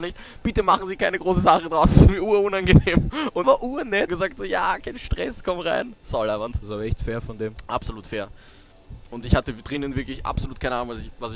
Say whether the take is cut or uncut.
cut